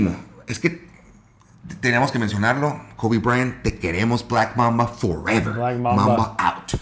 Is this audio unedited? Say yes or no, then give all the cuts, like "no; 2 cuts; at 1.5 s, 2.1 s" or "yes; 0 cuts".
yes; 0 cuts